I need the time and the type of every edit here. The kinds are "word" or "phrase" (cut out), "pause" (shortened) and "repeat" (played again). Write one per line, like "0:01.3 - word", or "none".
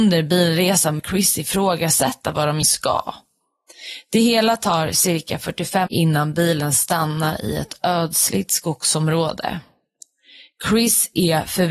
0:01.0 - word
0:02.6 - word
0:05.9 - word

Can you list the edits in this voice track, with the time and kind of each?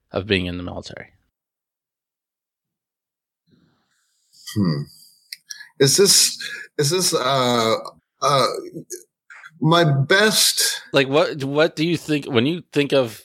0:08.0 - pause

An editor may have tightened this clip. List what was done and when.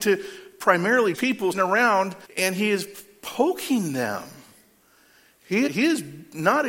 0:01.1 - word
0:01.5 - word
0:02.2 - pause
0:05.7 - word

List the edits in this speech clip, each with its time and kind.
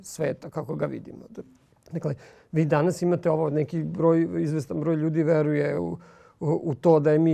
none

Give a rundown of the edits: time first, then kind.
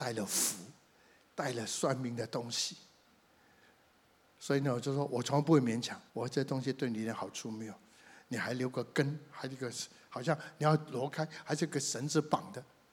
0:06.1 - pause

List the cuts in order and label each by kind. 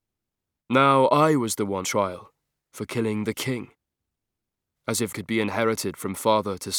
0:01.8 - word
0:05.1 - word

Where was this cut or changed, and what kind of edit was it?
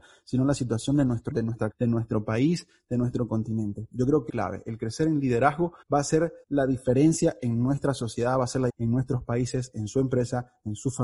0:01.3 - word
0:01.7 - word
0:04.3 - phrase
0:05.8 - pause
0:06.4 - pause
0:08.7 - word

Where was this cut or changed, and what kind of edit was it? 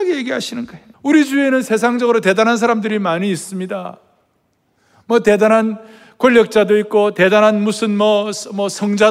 0:00.9 - pause

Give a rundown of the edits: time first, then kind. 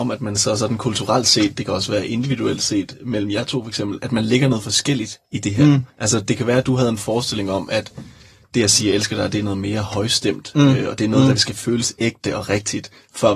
0:05.2 - pause
0:05.9 - pause
0:11.4 - word

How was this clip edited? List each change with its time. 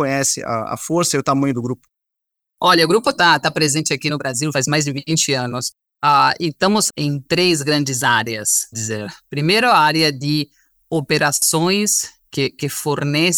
0:04.5 - phrase
0:06.9 - word
0:08.7 - word

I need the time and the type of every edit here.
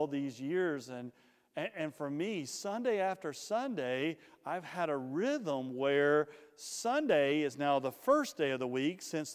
none

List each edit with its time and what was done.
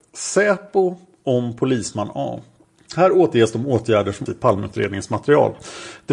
0:04.3 - word

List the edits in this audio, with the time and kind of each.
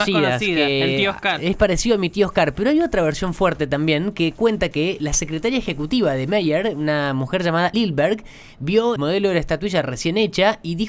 0:07.7 - word
0:09.0 - word

